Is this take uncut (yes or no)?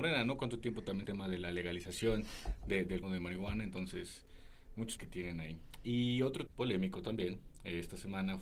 no